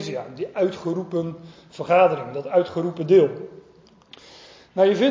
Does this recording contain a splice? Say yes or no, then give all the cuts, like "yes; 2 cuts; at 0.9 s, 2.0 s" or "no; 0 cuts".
no; 0 cuts